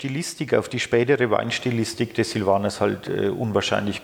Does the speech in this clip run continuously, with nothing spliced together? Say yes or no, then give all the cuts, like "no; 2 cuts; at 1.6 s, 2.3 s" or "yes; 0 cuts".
yes; 0 cuts